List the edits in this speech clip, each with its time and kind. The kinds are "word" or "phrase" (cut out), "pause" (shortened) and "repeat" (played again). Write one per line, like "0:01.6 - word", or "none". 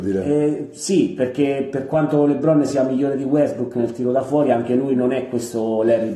none